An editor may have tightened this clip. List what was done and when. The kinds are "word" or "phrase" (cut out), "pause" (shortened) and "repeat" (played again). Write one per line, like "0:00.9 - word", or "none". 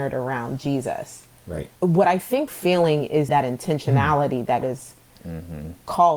0:01.8 - pause
0:02.5 - word
0:03.3 - phrase
0:04.6 - word